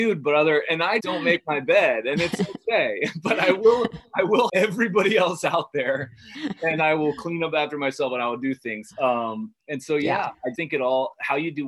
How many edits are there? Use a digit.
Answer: 3